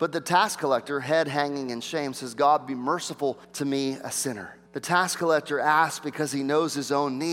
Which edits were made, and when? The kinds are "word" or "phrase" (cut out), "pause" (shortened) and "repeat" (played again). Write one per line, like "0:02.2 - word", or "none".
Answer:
0:03.4 - pause
0:04.7 - pause